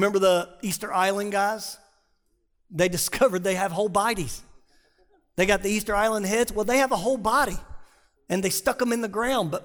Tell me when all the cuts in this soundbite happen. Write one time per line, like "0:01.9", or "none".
none